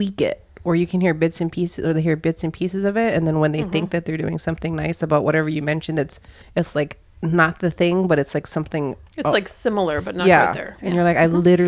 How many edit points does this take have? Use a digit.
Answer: 0